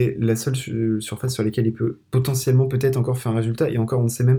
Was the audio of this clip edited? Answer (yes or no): no